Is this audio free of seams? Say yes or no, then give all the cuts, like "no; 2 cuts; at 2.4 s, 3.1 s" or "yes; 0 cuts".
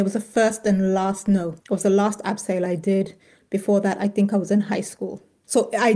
yes; 0 cuts